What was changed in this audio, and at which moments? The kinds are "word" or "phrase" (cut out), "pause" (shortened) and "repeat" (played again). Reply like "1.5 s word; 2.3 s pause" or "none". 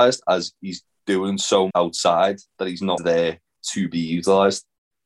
1.7 s word; 2.5 s pause; 3.0 s word